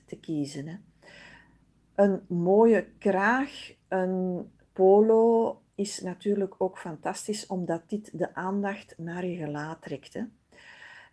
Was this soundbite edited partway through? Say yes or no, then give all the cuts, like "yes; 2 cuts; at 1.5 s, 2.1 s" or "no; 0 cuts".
no; 0 cuts